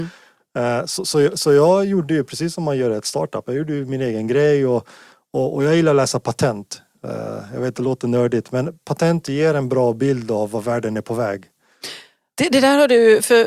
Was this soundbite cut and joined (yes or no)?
no